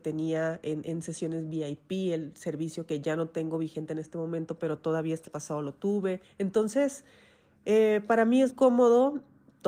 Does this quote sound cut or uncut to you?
cut